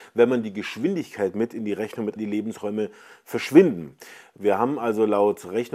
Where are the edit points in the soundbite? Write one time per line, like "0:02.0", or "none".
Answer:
0:02.2